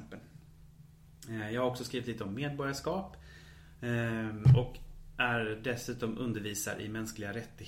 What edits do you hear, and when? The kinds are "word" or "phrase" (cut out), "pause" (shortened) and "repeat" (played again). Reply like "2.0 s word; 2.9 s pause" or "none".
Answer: none